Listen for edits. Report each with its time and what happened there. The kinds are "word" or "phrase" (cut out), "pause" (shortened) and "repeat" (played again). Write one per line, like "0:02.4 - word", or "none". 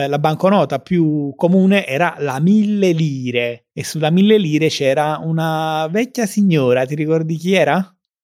0:03.7 - pause

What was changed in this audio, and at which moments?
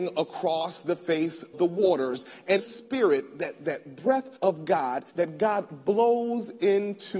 0:01.5 - word
0:02.6 - phrase
0:04.4 - pause
0:05.1 - pause

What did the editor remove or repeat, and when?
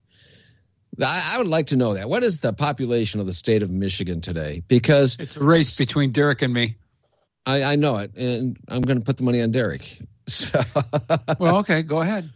none

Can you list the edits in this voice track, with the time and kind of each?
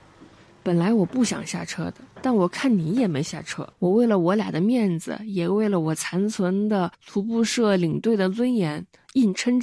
0:02.1 - pause
0:03.7 - pause
0:06.9 - pause

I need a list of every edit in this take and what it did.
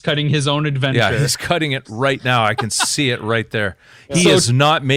none

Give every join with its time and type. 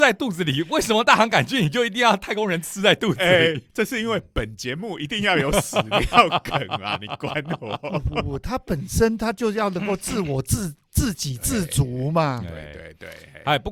0:03.7 - pause

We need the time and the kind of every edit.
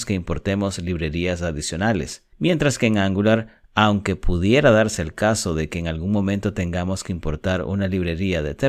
0:02.3 - pause

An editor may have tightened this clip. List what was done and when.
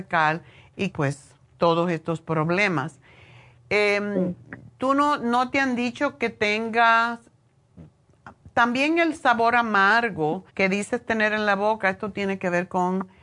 0:00.9 - word
0:01.4 - pause
0:10.5 - pause

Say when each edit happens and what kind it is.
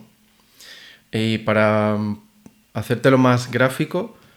none

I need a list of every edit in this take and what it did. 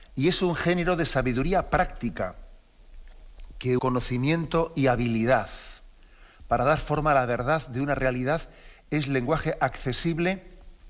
0:03.8 - word

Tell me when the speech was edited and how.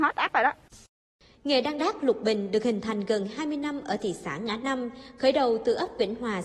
none

